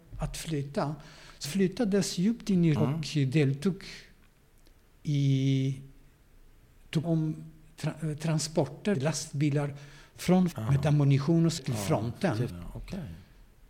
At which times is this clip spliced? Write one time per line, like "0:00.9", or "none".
0:01.4
0:02.8
0:07.0
0:08.9
0:10.5
0:11.6
0:12.5